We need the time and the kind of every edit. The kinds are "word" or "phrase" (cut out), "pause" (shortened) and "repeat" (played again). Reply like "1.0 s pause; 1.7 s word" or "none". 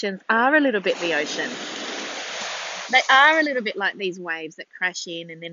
0.9 s word